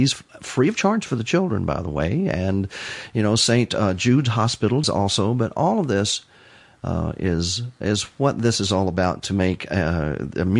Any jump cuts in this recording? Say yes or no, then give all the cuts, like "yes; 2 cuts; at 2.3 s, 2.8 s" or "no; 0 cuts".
yes; 1 cut; at 4.8 s